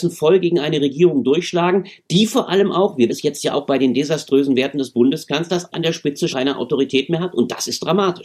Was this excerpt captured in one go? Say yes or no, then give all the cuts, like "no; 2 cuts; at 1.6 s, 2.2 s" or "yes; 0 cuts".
no; 3 cuts; at 3.1 s, 5.7 s, 6.3 s